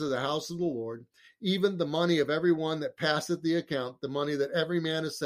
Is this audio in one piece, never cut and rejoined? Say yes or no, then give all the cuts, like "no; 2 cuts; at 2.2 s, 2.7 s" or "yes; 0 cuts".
yes; 0 cuts